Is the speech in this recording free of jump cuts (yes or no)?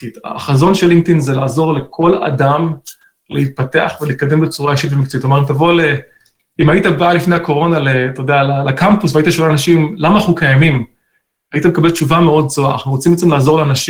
yes